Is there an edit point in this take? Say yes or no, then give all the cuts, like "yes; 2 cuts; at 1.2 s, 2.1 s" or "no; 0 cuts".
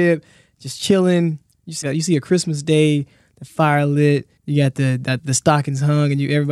yes; 2 cuts; at 1.8 s, 4.4 s